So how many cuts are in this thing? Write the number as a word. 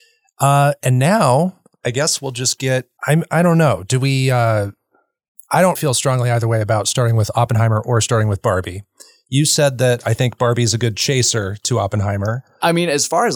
two